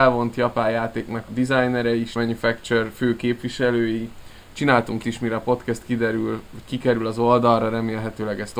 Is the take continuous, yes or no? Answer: no